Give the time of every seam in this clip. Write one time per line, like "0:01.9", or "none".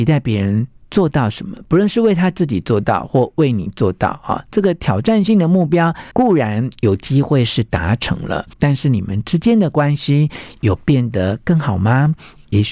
0:06.1
0:08.5